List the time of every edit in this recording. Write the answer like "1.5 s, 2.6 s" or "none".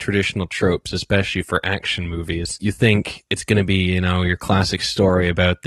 none